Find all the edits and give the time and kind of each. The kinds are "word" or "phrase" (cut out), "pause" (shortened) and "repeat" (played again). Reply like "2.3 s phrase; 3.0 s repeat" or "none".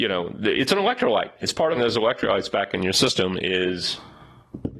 1.7 s phrase